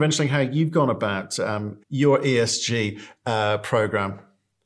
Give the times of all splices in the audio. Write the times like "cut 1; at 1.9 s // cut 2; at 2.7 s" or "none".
cut 1; at 1.8 s